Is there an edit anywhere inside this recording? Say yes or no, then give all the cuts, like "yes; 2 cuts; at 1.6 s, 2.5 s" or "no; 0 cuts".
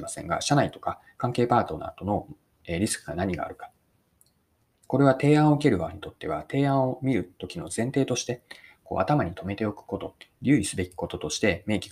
no; 0 cuts